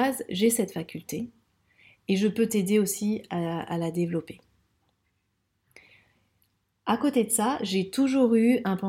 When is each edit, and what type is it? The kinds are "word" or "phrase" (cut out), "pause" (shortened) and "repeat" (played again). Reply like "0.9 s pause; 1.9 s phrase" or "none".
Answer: none